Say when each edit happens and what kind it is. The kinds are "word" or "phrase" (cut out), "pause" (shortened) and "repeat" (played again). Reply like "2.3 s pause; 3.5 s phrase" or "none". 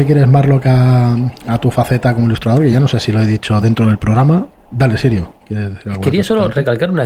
none